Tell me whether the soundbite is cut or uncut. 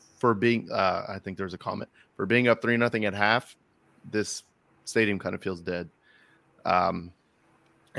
uncut